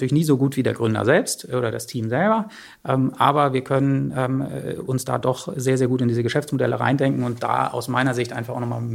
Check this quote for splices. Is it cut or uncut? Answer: uncut